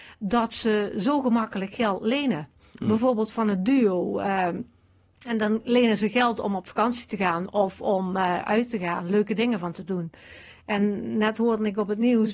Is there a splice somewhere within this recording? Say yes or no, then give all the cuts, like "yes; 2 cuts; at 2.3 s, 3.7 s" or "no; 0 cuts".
no; 0 cuts